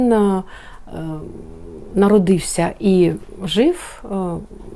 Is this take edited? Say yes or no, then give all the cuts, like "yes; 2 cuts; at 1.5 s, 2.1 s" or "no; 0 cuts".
no; 0 cuts